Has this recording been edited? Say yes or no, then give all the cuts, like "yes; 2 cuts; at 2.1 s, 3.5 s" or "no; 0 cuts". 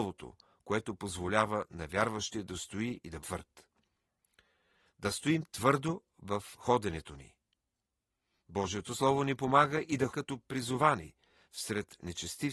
yes; 2 cuts; at 3.2 s, 10.1 s